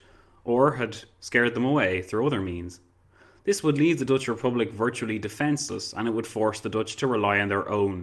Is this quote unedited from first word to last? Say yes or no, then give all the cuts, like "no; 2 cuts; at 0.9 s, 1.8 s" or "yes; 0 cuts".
yes; 0 cuts